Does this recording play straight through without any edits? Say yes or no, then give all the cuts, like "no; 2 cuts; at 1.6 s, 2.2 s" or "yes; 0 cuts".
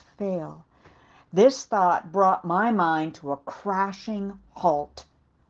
yes; 0 cuts